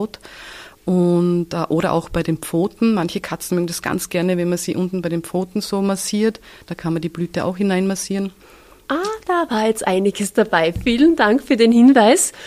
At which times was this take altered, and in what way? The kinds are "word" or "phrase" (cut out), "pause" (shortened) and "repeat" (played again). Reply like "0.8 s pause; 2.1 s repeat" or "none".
none